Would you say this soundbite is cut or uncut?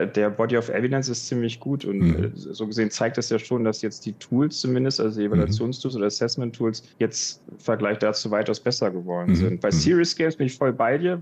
cut